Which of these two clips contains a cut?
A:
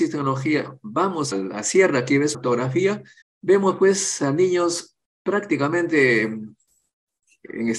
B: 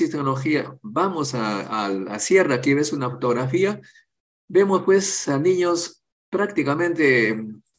A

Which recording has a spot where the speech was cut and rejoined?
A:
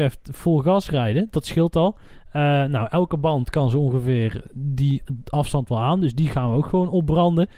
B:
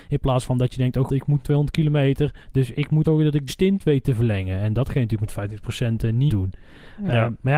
B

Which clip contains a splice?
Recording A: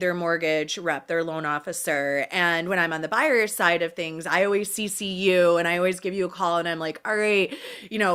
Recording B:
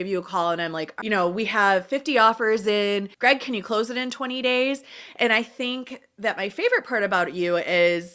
B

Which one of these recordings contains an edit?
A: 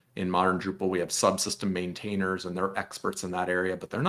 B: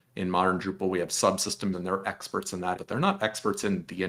B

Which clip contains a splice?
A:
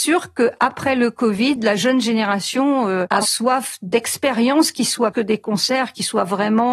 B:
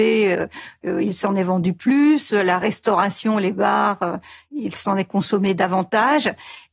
A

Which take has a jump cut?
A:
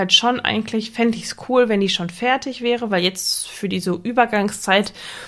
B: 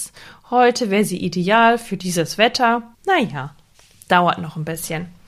B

